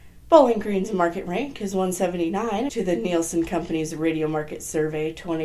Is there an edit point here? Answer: yes; 1 cut; at 2.7 s

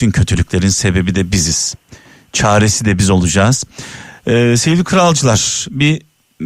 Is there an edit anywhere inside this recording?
no; 0 cuts

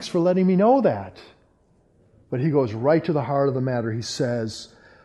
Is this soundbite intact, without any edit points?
yes; 0 cuts

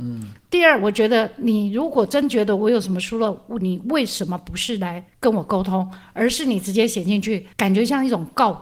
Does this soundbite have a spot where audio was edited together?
yes; 2 cuts; at 5.1 s, 7.5 s

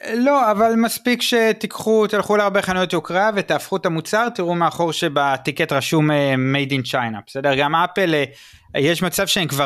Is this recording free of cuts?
yes; 0 cuts

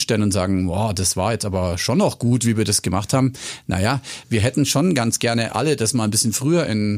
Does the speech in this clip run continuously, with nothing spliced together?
yes; 0 cuts

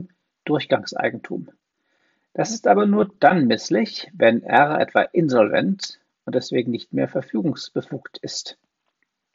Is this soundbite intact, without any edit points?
yes; 0 cuts

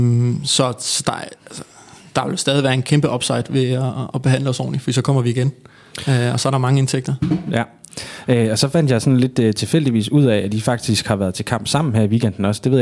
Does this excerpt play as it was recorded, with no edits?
yes; 0 cuts

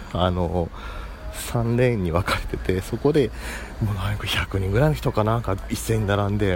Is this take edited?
no; 0 cuts

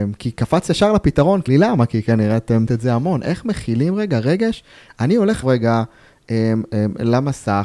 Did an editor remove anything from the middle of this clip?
yes; 3 cuts; at 1.5 s, 2.7 s, 5.4 s

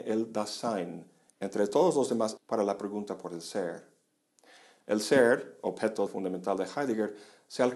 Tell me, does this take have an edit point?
yes; 2 cuts; at 2.4 s, 6.1 s

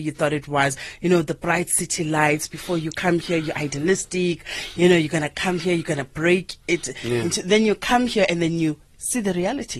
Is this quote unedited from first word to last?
no; 1 cut; at 8.9 s

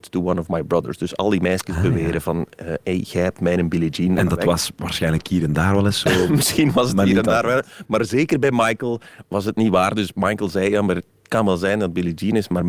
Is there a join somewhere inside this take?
no; 0 cuts

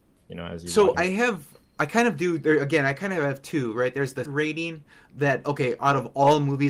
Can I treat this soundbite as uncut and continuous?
no; 2 cuts; at 0.9 s, 4.3 s

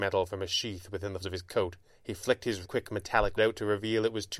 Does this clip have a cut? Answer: yes; 4 cuts; at 1.2 s, 1.9 s, 2.6 s, 3.4 s

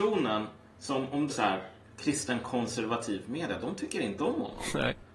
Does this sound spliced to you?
yes; 1 cut; at 1.3 s

